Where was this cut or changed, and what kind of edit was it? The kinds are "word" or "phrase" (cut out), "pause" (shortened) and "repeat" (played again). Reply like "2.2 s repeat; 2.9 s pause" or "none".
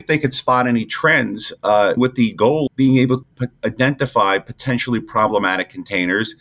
2.0 s word; 2.7 s word; 3.2 s word

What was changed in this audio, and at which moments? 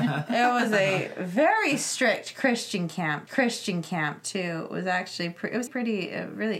3.3 s repeat; 5.7 s word

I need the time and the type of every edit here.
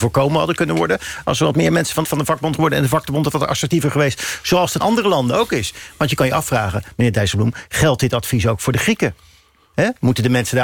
2.0 s word; 2.5 s word; 4.8 s word

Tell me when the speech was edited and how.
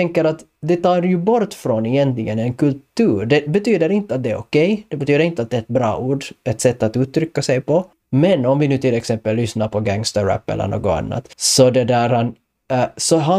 7.9 s pause; 11.3 s pause

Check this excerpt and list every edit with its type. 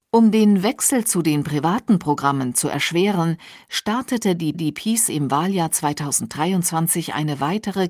4.5 s repeat

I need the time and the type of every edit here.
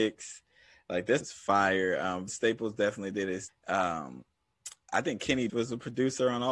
1.2 s word; 2.3 s word; 3.5 s word; 4.9 s phrase; 5.5 s word

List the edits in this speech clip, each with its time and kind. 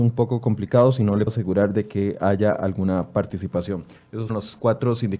1.3 s word; 4.3 s word

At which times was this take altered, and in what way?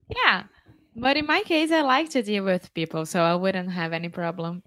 none

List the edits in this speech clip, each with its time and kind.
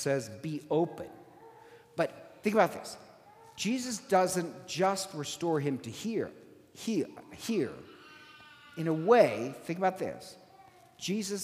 none

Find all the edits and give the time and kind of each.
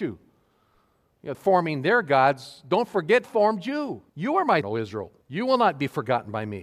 1.3 s phrase; 3.2 s phrase; 4.1 s pause; 4.6 s word; 5.2 s pause

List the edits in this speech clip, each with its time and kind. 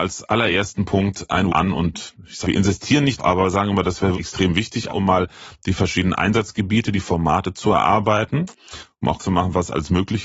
1.5 s word; 2.4 s word; 3.2 s word; 4.1 s word; 4.9 s word; 9.2 s word

